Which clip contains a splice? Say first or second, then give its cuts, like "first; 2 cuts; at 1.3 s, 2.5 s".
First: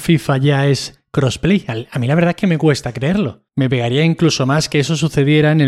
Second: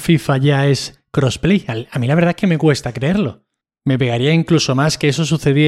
first; 1 cut; at 3.5 s